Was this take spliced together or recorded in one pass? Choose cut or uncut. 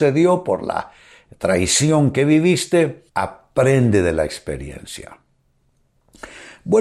cut